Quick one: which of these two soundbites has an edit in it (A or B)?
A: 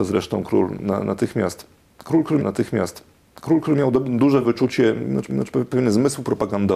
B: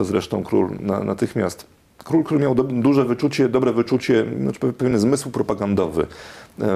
A